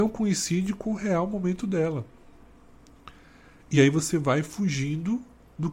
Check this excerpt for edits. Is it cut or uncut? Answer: uncut